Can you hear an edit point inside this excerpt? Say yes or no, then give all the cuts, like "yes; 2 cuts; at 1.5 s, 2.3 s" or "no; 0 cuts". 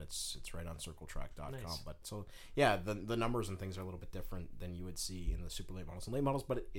yes; 1 cut; at 2.0 s